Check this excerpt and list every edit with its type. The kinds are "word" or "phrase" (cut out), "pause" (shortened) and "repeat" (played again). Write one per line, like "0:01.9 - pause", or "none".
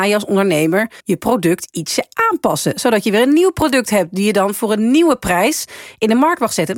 0:01.0 - pause